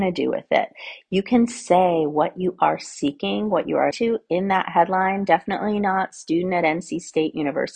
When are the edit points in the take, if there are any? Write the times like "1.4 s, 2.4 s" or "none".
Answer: 3.9 s